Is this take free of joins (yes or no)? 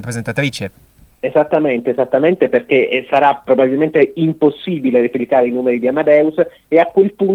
yes